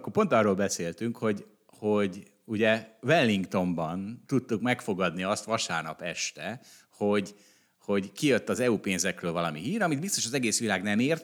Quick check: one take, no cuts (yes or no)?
yes